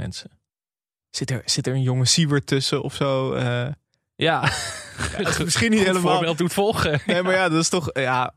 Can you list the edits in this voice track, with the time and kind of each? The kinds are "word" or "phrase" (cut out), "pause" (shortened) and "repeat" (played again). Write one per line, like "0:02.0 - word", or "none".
none